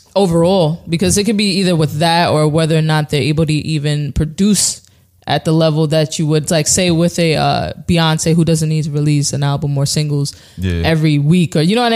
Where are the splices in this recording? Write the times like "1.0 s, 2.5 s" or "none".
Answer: none